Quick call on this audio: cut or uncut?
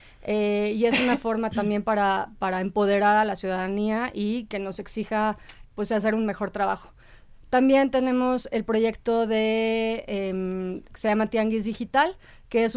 cut